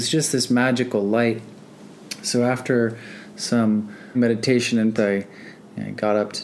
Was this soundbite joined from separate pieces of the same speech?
yes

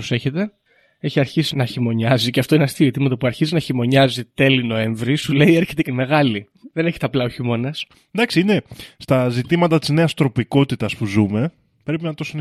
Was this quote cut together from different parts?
yes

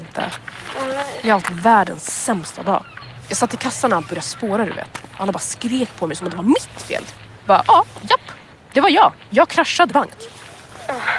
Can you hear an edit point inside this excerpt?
yes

